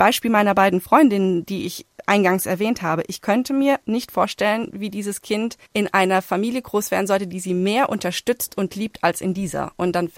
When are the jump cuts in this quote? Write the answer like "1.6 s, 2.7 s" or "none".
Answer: 5.6 s